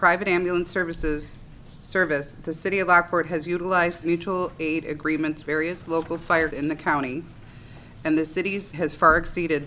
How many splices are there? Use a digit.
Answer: 4